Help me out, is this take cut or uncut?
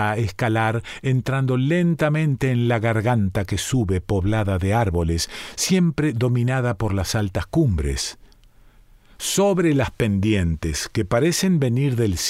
uncut